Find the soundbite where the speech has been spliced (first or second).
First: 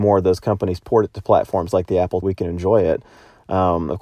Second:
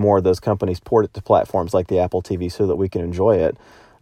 first